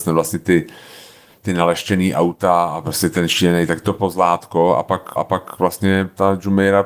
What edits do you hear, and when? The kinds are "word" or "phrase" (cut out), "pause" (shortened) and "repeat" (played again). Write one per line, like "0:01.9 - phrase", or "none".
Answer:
0:05.2 - repeat